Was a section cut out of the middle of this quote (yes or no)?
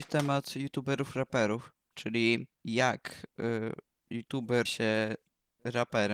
yes